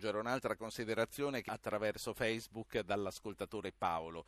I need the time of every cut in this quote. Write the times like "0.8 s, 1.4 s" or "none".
1.5 s